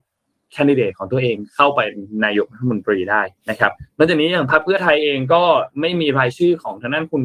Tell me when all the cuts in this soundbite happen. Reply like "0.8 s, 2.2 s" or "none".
3.4 s